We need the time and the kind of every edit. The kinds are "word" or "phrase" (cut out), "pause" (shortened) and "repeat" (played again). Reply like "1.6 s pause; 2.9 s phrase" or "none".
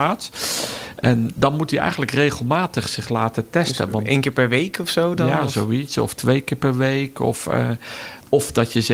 none